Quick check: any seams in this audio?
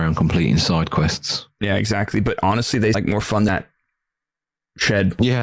yes; 2 cuts; at 2.9 s, 3.5 s

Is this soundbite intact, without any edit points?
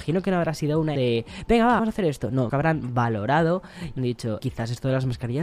no; 5 cuts; at 0.9 s, 1.8 s, 2.5 s, 4.0 s, 4.4 s

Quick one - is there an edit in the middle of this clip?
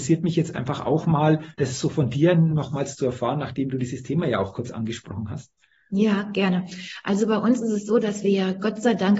no; 0 cuts

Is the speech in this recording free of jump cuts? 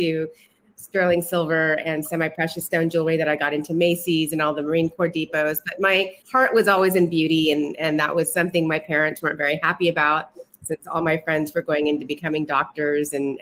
no; 1 cut; at 6.2 s

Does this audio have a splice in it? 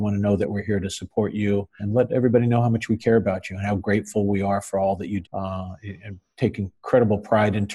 yes; 2 cuts; at 1.8 s, 5.2 s

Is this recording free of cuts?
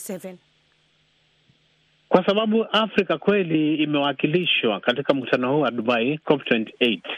yes; 0 cuts

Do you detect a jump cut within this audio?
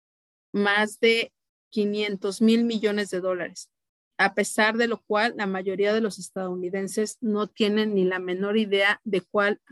no; 0 cuts

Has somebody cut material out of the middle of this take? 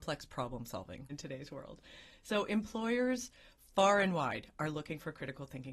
yes; 1 cut; at 1.1 s

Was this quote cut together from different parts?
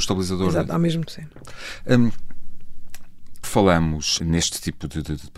yes; 3 cuts; at 1.0 s, 3.4 s, 4.2 s

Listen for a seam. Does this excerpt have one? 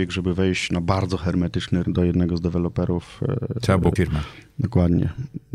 yes; 2 cuts; at 1.8 s, 4.0 s

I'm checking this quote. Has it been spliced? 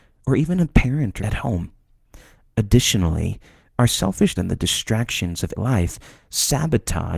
yes; 3 cuts; at 1.2 s, 4.4 s, 5.6 s

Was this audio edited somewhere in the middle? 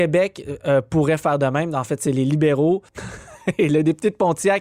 no; 0 cuts

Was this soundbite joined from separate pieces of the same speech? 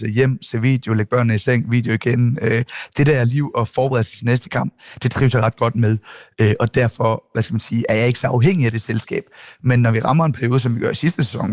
no; 0 cuts

